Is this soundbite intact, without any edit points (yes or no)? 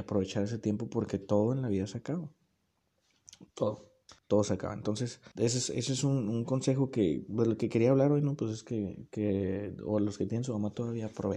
no